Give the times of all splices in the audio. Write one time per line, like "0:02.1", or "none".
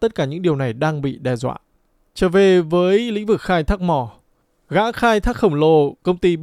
none